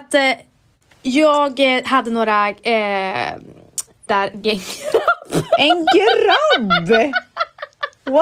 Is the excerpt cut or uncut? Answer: cut